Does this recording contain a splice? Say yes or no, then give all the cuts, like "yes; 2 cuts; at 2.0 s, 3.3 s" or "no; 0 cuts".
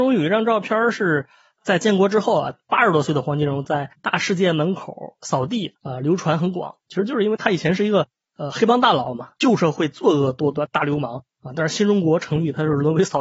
yes; 3 cuts; at 3.9 s, 5.8 s, 6.8 s